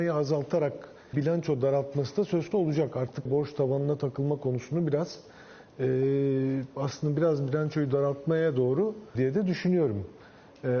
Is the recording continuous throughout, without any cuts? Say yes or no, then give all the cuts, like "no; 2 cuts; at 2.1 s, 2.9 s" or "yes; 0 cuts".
no; 4 cuts; at 1.1 s, 2.5 s, 3.3 s, 9.1 s